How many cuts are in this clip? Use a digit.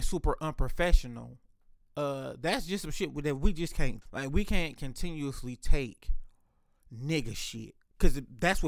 1